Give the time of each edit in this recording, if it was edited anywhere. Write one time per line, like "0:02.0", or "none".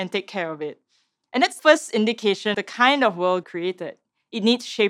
0:01.6
0:02.5
0:03.4